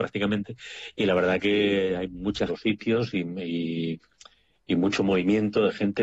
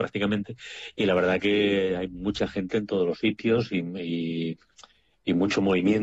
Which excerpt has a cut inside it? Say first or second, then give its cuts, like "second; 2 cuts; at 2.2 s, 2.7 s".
first; 1 cut; at 2.5 s